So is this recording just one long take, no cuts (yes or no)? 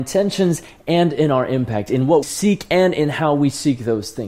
no